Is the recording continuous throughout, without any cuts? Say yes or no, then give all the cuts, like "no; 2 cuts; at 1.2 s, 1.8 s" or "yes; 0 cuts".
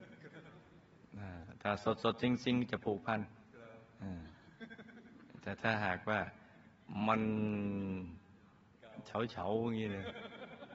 yes; 0 cuts